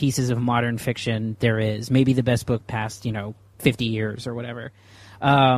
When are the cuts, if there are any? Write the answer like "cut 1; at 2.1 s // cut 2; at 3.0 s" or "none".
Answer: cut 1; at 2.6 s